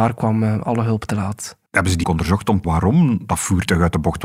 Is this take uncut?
no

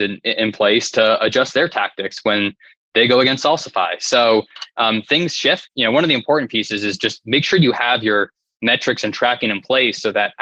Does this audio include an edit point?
no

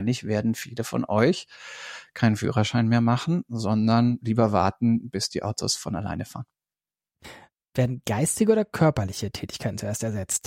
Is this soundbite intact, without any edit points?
yes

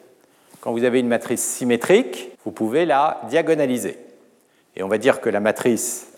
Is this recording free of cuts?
no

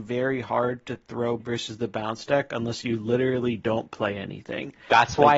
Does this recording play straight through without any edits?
no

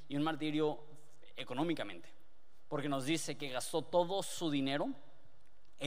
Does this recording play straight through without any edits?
yes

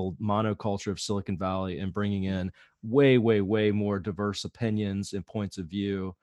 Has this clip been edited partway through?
no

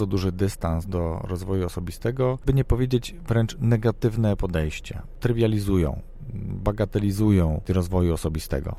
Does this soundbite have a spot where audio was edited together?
yes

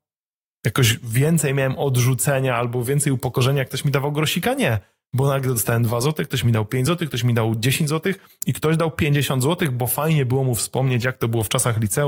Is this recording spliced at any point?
no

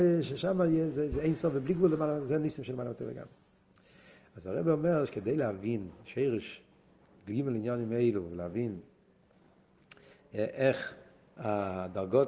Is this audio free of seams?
yes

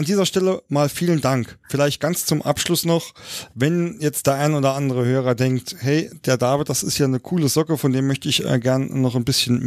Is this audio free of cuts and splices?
yes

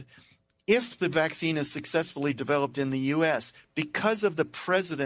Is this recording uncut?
yes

